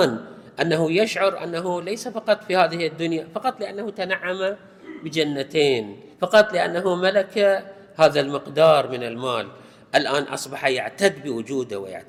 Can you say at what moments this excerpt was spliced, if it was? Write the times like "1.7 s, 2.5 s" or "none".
6.1 s